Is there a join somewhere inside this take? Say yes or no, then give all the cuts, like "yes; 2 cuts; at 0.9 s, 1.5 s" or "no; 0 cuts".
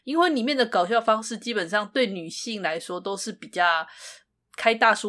no; 0 cuts